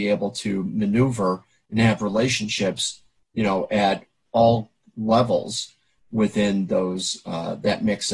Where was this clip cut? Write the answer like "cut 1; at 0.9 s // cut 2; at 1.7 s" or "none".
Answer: none